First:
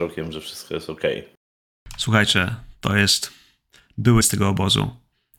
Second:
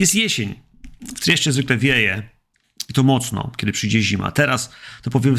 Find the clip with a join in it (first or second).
first